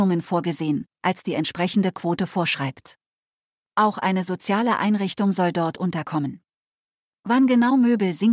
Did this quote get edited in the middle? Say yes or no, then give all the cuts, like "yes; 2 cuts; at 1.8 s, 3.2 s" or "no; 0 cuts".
no; 0 cuts